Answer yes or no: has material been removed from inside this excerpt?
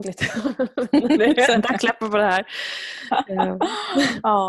yes